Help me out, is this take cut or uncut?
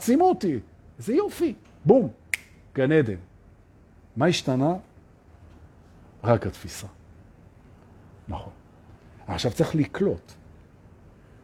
uncut